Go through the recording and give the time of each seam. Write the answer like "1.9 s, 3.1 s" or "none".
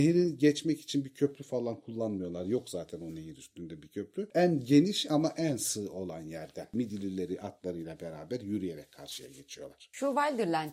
none